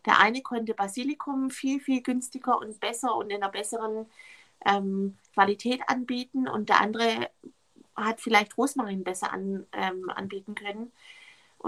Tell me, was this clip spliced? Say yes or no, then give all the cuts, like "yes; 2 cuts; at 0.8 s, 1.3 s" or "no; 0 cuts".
no; 0 cuts